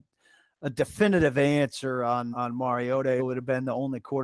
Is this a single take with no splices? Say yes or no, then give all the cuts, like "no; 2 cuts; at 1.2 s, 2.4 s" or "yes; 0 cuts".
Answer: no; 2 cuts; at 2.3 s, 3.2 s